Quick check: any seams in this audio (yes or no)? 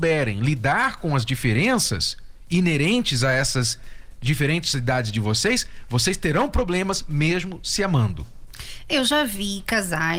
no